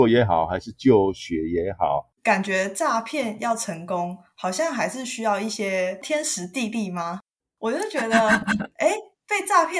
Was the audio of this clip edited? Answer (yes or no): yes